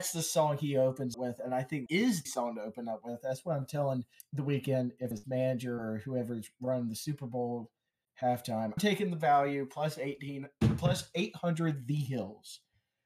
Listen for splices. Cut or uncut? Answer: cut